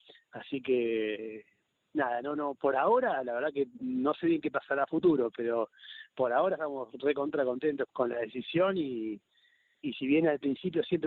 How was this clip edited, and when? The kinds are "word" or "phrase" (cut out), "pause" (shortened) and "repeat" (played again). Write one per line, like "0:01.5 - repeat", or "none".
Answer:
none